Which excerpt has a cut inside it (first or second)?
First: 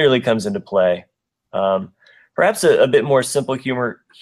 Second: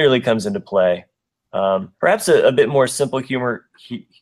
second